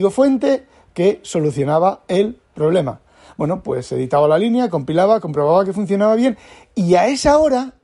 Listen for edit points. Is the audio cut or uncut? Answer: uncut